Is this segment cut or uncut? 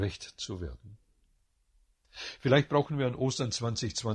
uncut